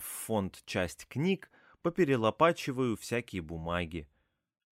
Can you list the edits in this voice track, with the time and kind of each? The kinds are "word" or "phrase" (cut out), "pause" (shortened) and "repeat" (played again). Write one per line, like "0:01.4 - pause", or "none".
none